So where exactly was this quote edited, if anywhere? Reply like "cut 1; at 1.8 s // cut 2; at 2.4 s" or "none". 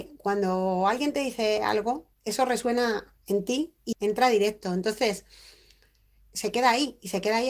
cut 1; at 3.9 s